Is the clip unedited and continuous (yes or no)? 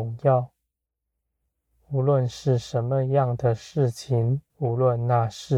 no